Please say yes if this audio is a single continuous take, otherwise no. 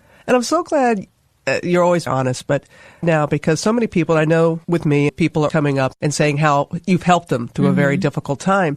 no